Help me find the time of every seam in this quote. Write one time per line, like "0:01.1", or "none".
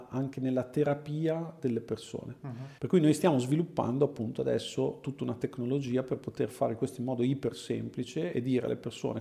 0:02.8